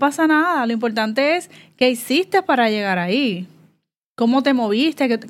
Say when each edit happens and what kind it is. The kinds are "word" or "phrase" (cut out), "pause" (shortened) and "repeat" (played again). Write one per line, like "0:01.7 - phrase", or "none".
none